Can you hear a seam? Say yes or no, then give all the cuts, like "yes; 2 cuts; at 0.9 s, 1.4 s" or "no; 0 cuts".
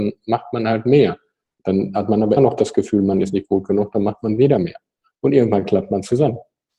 yes; 1 cut; at 2.4 s